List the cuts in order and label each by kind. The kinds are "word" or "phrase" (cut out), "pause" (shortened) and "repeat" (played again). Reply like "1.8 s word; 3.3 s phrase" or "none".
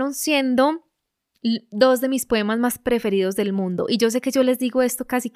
none